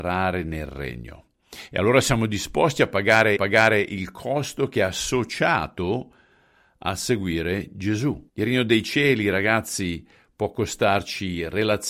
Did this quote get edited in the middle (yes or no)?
yes